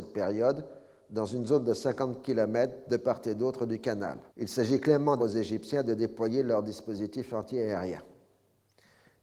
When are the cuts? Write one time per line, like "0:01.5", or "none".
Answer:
0:04.3
0:05.2